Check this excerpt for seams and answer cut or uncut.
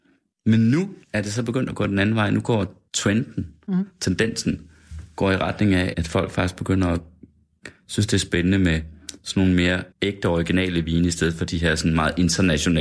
cut